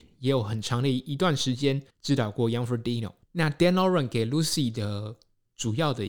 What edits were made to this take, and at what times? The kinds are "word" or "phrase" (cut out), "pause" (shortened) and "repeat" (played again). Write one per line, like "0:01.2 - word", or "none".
0:01.9 - pause
0:03.2 - pause